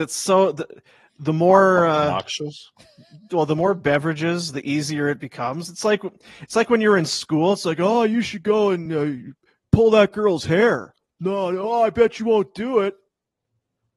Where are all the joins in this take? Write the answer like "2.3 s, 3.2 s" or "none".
none

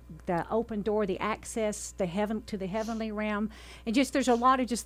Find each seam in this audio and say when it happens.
none

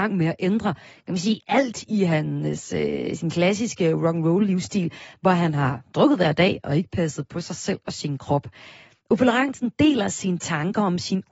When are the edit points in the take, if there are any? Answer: none

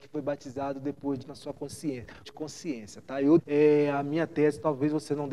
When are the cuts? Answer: 1.2 s, 2.2 s, 3.4 s

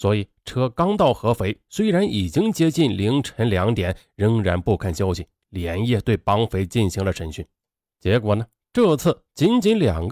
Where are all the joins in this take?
none

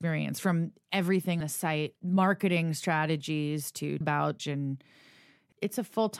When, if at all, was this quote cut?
1.4 s, 2.0 s, 4.0 s, 4.4 s

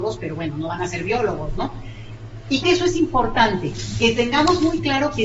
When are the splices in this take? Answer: 2.6 s

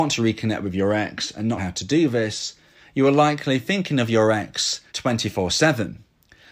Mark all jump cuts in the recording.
1.6 s, 4.9 s

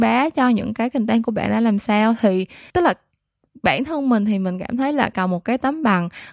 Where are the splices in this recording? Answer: 2.7 s, 5.1 s

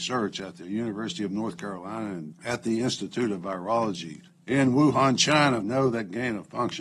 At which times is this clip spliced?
2.3 s, 4.3 s, 5.6 s

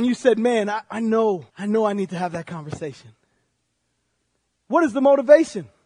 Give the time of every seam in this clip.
1.5 s

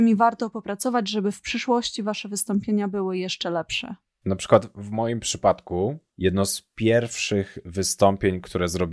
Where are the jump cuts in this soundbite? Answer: 6.1 s

